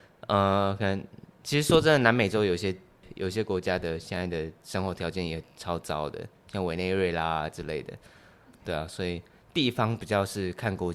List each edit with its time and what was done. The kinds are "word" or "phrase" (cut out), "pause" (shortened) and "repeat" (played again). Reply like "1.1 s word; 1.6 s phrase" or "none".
none